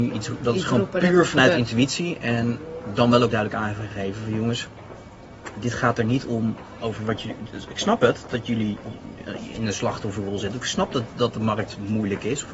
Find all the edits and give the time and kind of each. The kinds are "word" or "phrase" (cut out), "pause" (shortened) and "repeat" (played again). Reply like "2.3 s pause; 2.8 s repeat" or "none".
3.3 s word